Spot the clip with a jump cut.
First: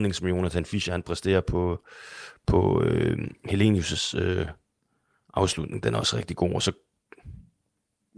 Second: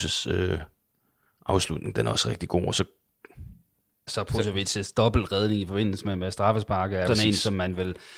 second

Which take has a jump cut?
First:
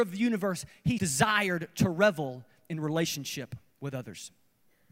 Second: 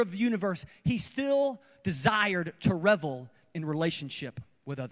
first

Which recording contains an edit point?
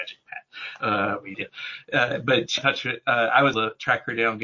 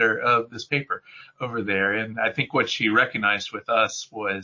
first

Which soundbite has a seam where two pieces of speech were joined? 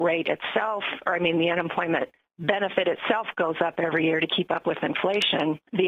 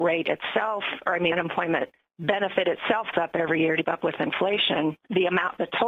second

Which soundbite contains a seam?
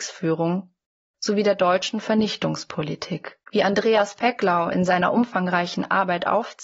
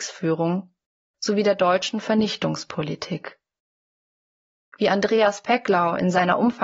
first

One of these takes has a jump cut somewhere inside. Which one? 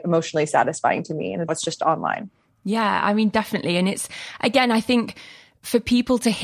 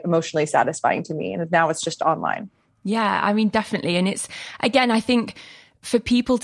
first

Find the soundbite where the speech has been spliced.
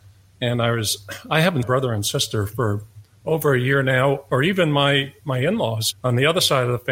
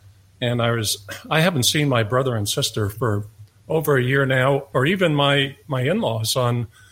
first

